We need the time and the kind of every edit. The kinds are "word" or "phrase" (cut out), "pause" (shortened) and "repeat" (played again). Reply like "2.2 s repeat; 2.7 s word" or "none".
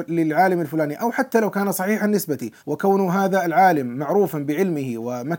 2.6 s pause